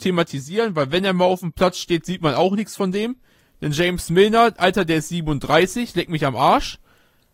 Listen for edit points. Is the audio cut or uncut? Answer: uncut